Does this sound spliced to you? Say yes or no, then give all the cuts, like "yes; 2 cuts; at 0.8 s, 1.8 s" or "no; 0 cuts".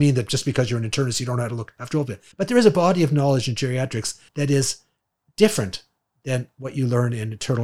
yes; 2 cuts; at 2.3 s, 4.3 s